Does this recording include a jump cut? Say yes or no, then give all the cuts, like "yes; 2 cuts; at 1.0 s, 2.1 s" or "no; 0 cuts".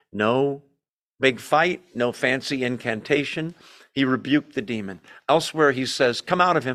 no; 0 cuts